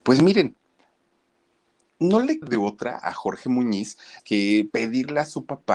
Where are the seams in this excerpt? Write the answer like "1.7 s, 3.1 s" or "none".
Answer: 2.4 s, 3.0 s, 4.2 s, 4.7 s